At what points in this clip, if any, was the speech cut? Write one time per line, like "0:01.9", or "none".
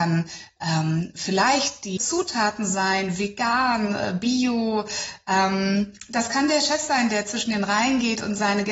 0:02.0